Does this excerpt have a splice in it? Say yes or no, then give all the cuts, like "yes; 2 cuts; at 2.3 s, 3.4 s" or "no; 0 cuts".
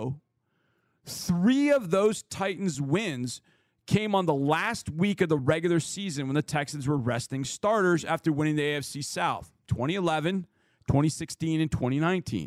no; 0 cuts